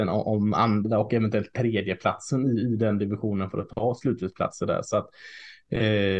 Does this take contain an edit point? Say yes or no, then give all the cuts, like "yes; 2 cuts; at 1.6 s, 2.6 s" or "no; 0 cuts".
no; 0 cuts